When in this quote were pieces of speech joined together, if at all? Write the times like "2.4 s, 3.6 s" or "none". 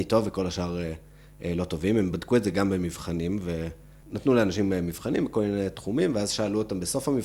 none